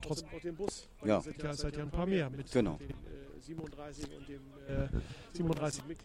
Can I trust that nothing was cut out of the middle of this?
yes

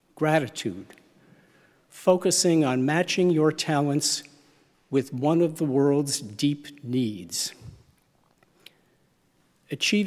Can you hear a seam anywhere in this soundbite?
no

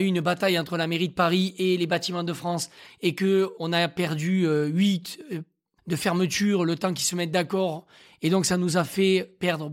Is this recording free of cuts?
no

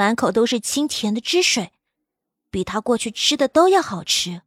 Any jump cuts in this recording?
no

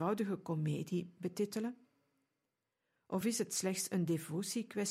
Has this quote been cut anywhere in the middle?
no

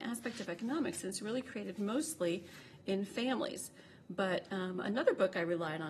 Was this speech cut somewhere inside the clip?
no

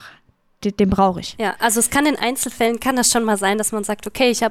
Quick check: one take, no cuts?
yes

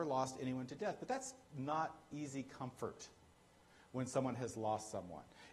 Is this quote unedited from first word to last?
yes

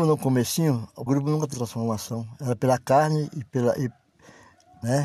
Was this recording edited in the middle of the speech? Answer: yes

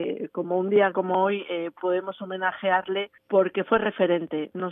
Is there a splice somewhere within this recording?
yes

